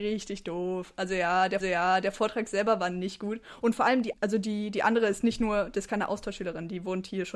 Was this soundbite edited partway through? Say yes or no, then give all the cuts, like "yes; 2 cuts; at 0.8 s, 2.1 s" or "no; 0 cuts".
yes; 2 cuts; at 1.6 s, 4.1 s